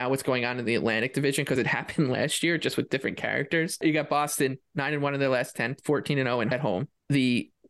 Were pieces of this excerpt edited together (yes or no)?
no